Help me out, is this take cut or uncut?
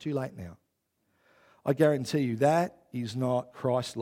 uncut